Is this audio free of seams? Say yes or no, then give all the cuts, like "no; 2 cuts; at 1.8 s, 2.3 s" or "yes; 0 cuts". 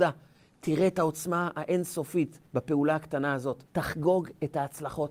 no; 2 cuts; at 2.5 s, 3.7 s